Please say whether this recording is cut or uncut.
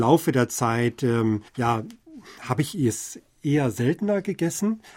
cut